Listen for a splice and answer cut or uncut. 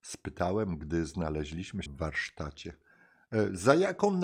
cut